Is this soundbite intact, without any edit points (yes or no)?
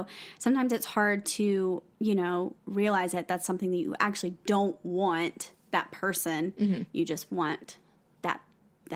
no